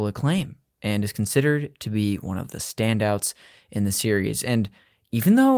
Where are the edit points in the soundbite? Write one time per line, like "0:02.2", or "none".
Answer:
none